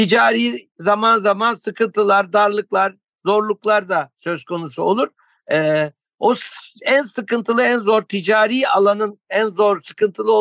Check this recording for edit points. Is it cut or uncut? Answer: uncut